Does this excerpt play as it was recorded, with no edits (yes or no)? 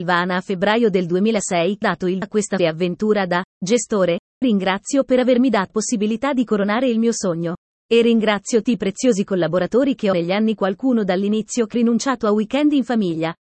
no